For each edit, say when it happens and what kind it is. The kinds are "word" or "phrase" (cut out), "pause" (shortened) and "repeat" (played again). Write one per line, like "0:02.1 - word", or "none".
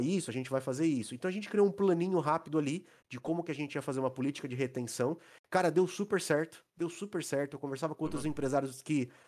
none

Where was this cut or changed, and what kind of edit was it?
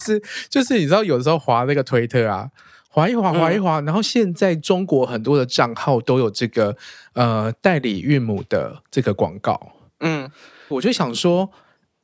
0:10.7 - word

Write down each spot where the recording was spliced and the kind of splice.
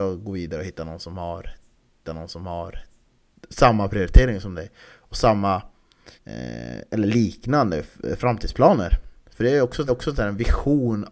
0:02.0 - repeat
0:06.2 - pause
0:09.9 - repeat

